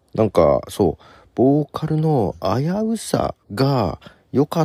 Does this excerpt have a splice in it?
yes; 1 cut; at 3.4 s

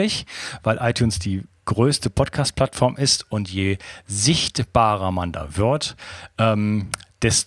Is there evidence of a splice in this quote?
no; 0 cuts

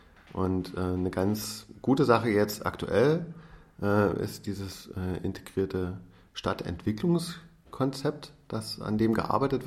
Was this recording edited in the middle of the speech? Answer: no; 0 cuts

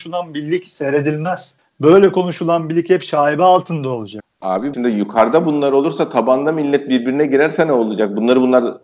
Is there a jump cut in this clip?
yes; 1 cut; at 4.7 s

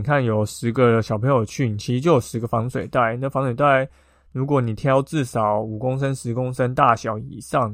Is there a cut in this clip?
no; 0 cuts

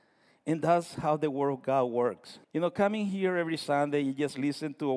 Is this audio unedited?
no; 1 cut; at 2.4 s

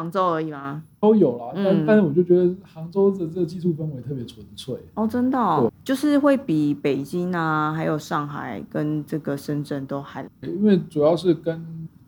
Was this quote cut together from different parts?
yes; 2 cuts; at 5.7 s, 10.3 s

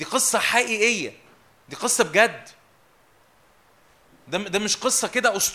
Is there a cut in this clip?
no; 0 cuts

